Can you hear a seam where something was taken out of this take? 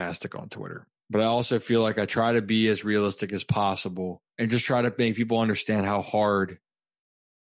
yes; 1 cut; at 4.3 s

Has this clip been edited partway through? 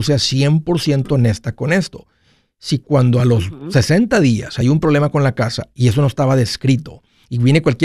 no; 0 cuts

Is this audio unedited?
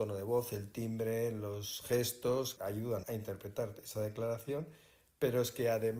no; 2 cuts; at 2.6 s, 3.0 s

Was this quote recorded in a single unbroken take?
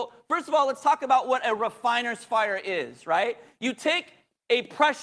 yes; 0 cuts

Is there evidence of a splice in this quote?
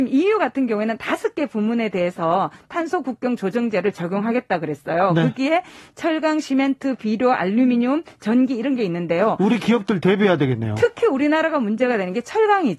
no; 0 cuts

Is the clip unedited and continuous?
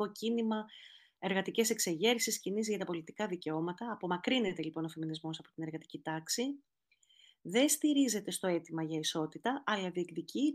yes; 0 cuts

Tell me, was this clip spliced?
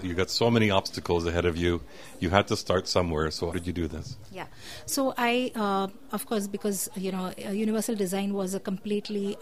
yes; 2 cuts; at 3.5 s, 6.1 s

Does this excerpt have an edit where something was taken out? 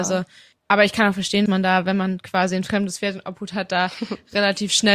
yes; 1 cut; at 1.5 s

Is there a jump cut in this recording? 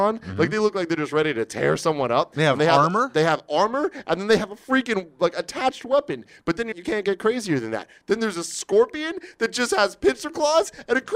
yes; 1 cut; at 6.7 s

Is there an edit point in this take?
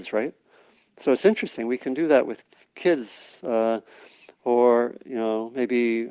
no; 0 cuts

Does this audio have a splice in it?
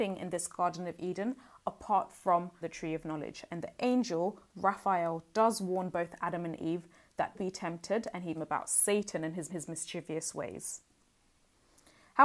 yes; 4 cuts; at 2.6 s, 7.3 s, 8.3 s, 9.5 s

